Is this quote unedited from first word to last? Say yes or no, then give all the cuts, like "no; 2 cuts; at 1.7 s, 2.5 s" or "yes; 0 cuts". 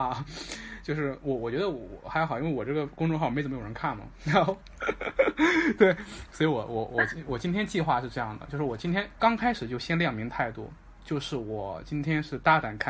yes; 0 cuts